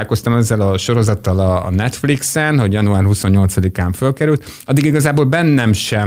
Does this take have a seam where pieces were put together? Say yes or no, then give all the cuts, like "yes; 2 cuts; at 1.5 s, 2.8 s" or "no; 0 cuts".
no; 0 cuts